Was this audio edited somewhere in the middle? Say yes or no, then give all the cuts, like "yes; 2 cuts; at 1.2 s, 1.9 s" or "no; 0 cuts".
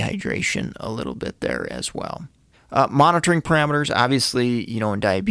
yes; 1 cut; at 2.5 s